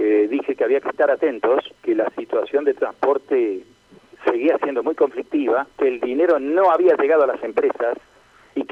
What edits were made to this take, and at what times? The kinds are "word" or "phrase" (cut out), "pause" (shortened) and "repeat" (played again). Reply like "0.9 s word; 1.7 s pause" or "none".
1.8 s pause; 5.7 s pause